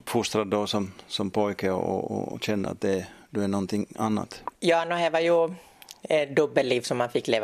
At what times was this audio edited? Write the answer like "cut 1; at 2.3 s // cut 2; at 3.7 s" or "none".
none

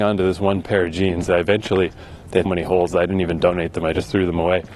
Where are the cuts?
cut 1; at 2.5 s

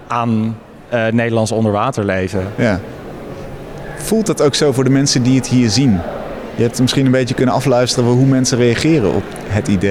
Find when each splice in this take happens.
none

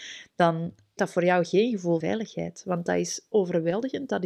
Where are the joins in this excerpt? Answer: cut 1; at 1.0 s // cut 2; at 2.0 s // cut 3; at 3.3 s

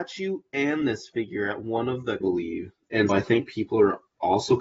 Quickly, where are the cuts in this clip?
cut 1; at 2.2 s // cut 2; at 3.1 s

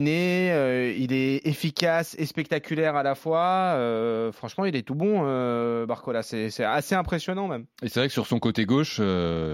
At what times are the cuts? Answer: none

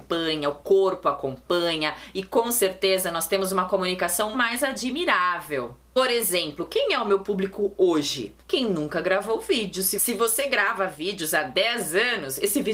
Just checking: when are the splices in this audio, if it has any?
cut 1; at 4.3 s // cut 2; at 8.4 s

